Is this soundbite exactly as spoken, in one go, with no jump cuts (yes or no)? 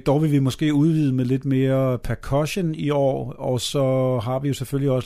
yes